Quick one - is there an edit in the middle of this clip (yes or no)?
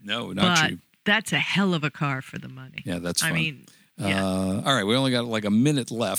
no